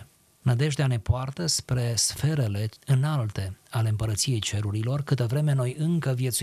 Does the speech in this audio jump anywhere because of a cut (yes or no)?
yes